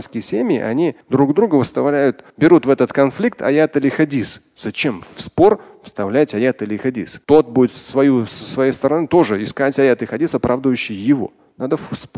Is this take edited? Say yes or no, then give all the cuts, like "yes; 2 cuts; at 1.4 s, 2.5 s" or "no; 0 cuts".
yes; 3 cuts; at 1.0 s, 2.3 s, 7.2 s